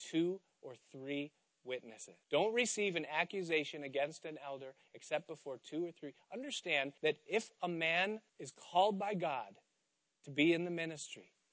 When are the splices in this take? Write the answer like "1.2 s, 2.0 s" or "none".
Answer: 2.2 s, 7.0 s, 8.3 s